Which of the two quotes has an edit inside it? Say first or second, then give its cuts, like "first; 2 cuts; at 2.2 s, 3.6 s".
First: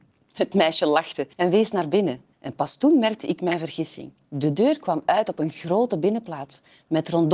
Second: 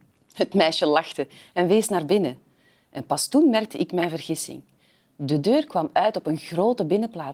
first; 3 cuts; at 1.3 s, 2.3 s, 4.3 s